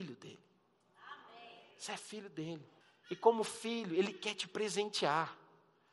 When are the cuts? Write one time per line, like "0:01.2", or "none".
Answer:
0:01.7
0:02.8